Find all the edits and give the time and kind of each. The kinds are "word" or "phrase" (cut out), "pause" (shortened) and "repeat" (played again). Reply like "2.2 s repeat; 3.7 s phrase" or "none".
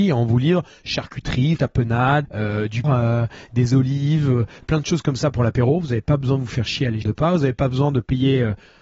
1.6 s word; 2.2 s word; 2.8 s phrase; 7.0 s word